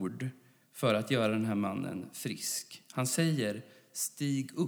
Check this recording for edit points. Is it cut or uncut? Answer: uncut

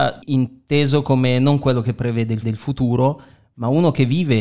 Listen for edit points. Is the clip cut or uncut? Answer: cut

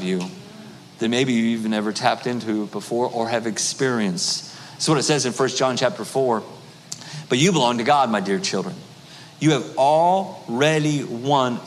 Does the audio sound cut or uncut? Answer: uncut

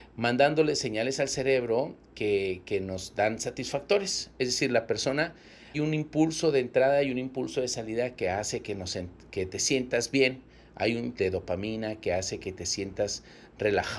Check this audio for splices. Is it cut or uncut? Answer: cut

